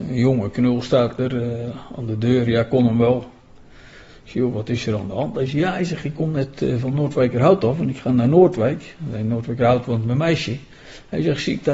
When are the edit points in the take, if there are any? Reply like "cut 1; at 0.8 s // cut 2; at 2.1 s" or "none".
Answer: none